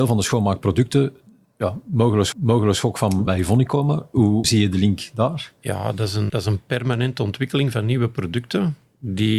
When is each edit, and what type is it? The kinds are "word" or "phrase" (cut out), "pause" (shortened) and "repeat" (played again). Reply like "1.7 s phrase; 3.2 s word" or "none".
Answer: 2.3 s repeat; 3.3 s word; 4.4 s word; 6.3 s word